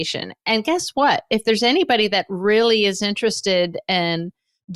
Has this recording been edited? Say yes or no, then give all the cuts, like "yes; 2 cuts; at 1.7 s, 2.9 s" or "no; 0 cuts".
no; 0 cuts